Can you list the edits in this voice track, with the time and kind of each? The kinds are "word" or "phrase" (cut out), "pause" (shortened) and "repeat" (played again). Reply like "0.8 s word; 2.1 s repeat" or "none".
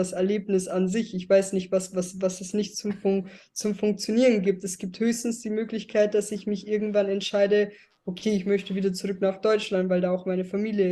none